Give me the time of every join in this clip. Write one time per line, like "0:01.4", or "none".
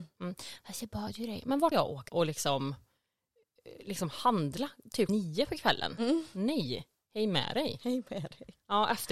0:01.7
0:02.1
0:05.1

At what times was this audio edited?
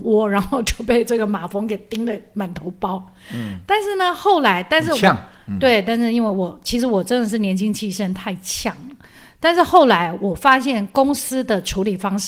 none

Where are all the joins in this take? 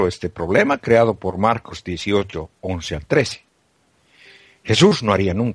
none

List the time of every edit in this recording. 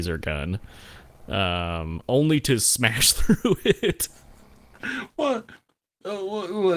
none

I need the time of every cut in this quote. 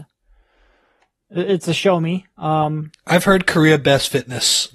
none

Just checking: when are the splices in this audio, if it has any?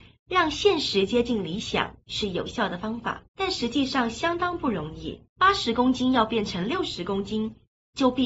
0:03.3
0:05.3

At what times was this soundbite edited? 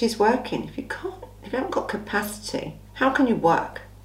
0:02.9

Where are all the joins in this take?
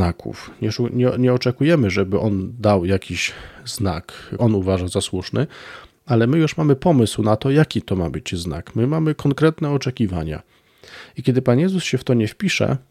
0:04.4

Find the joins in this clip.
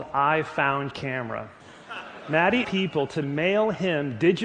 0:00.9
0:01.6
0:02.6

